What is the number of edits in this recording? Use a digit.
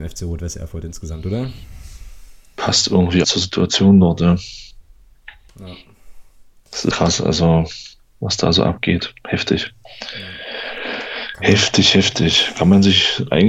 2